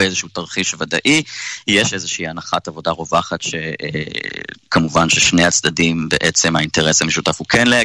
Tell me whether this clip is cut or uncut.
uncut